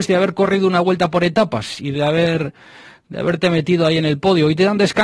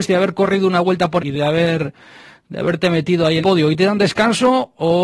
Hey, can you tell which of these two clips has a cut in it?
second; 2 cuts; at 1.2 s, 3.4 s

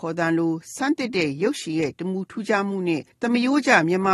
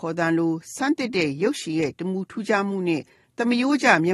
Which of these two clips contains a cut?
first; 1 cut; at 3.1 s

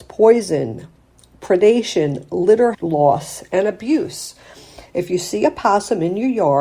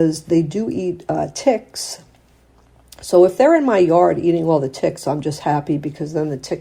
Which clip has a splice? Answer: first; 1 cut; at 2.7 s

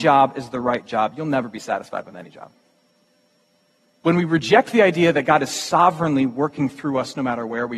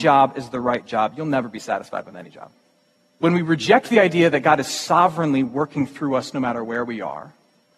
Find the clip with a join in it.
second; 1 cut; at 2.8 s

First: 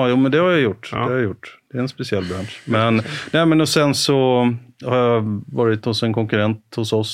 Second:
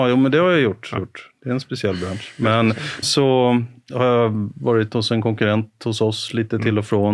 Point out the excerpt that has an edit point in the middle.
second; 2 cuts; at 1.0 s, 3.0 s

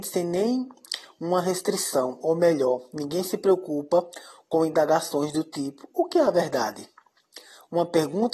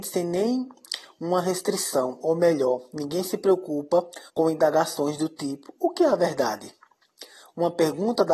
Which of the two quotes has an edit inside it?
second; 1 cut; at 4.3 s

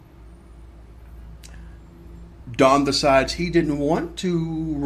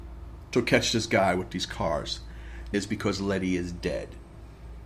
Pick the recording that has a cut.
second; 1 cut; at 2.7 s

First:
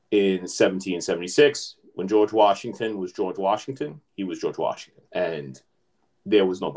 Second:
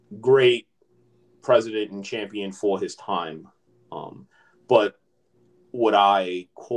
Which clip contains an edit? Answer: first; 1 cut; at 5.1 s

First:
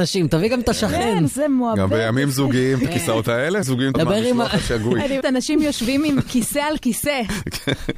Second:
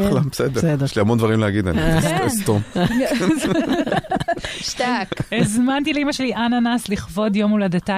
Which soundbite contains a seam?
first; 3 cuts; at 3.6 s, 3.9 s, 5.2 s

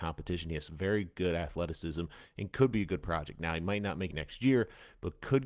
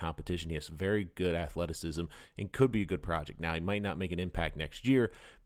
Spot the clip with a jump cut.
first; 1 cut; at 4.1 s

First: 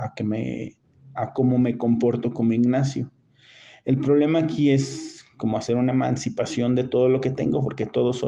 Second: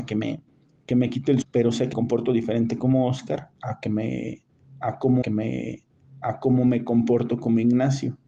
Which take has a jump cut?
second; 3 cuts; at 1.4 s, 1.9 s, 5.2 s

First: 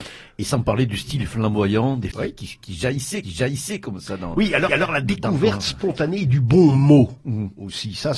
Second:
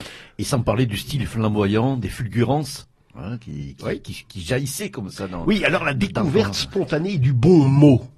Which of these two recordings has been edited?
first; 3 cuts; at 2.1 s, 3.2 s, 4.7 s

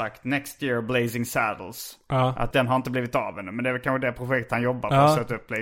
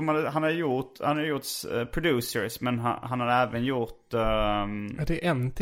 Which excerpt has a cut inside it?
first; 1 cut; at 2.5 s

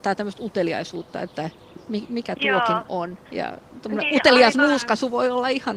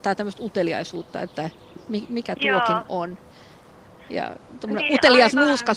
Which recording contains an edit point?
first; 1 cut; at 3.3 s

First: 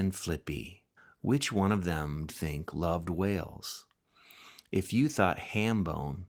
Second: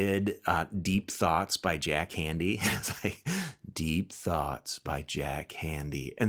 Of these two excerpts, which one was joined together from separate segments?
first; 2 cuts; at 1.0 s, 2.3 s

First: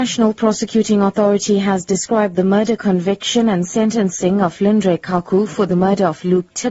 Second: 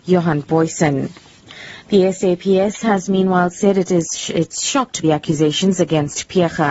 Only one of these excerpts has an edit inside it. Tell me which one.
second; 1 cut; at 5.0 s

